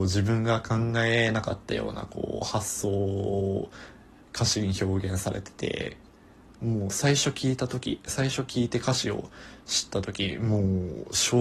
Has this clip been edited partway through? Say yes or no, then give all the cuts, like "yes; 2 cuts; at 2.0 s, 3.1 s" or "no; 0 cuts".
no; 0 cuts